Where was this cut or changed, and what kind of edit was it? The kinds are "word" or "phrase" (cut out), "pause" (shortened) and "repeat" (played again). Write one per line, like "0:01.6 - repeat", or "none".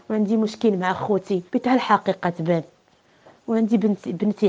0:01.5 - pause